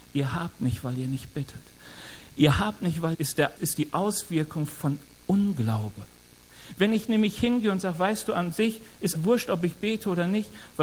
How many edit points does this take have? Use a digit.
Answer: 3